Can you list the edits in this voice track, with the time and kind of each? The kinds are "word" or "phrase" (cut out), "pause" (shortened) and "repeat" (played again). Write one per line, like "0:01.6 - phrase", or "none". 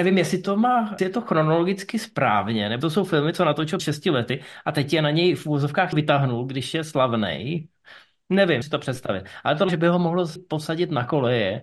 0:01.0 - word
0:02.8 - word
0:03.8 - word
0:05.9 - word
0:08.6 - word
0:09.7 - word
0:10.4 - word